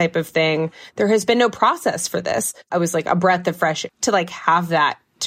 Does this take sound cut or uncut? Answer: cut